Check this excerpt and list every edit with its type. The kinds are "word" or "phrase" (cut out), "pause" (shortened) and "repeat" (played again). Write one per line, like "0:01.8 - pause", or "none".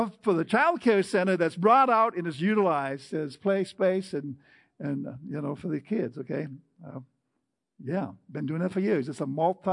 none